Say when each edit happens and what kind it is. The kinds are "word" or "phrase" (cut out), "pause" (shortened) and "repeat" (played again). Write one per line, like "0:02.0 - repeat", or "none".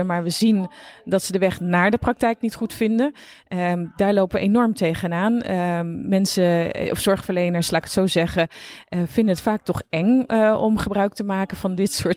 none